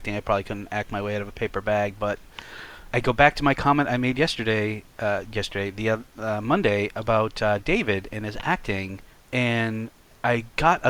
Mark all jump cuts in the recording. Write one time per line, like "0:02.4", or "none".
0:02.9
0:09.1